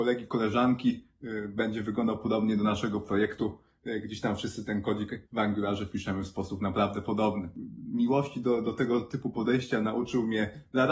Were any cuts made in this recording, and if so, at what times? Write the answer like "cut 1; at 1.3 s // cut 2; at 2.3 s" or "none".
cut 1; at 5.3 s